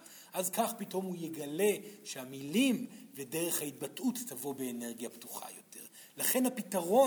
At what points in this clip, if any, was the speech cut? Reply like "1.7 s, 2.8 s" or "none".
none

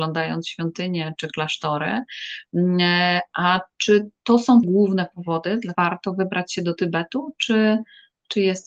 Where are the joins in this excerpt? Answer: 1.1 s, 4.6 s, 5.7 s

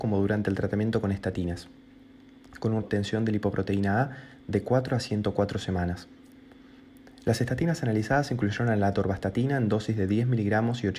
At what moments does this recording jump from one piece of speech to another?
2.8 s

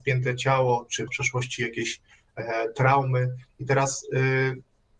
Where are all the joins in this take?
1.1 s

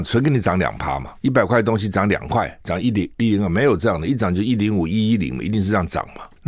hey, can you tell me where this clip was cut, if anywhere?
1.2 s

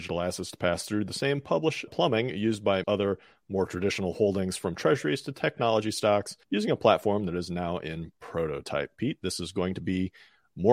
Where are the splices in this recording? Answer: 1.9 s, 2.8 s, 6.4 s

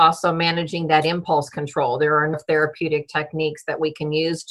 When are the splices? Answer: 2.3 s

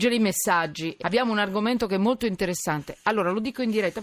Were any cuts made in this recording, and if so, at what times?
1.0 s

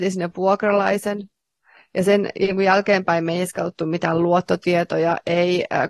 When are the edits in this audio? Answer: none

